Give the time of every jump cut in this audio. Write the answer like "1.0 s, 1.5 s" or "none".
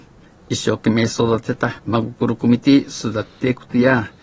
1.8 s